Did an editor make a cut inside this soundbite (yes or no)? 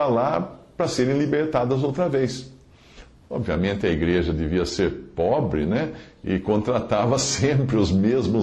no